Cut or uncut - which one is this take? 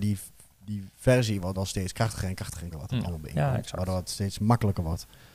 cut